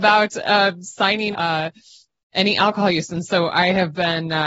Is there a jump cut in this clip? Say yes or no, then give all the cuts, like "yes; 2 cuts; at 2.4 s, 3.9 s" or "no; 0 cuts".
yes; 1 cut; at 1.3 s